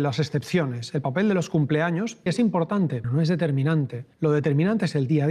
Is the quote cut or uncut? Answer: cut